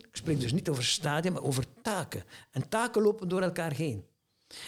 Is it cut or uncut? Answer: uncut